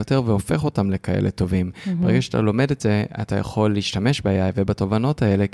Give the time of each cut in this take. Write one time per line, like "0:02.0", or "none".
none